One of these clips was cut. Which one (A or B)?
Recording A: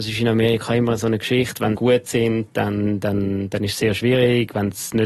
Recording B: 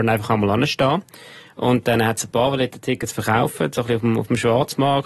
A